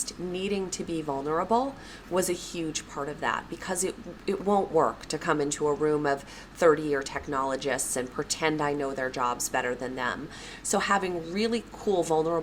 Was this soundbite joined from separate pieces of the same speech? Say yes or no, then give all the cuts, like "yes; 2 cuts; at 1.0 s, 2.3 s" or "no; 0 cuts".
no; 0 cuts